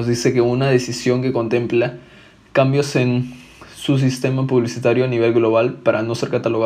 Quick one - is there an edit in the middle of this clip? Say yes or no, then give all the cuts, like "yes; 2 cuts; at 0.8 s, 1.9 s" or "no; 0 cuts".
no; 0 cuts